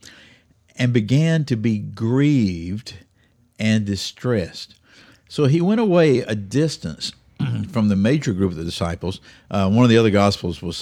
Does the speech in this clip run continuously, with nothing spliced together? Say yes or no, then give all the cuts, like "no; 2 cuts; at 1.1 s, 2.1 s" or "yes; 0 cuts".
yes; 0 cuts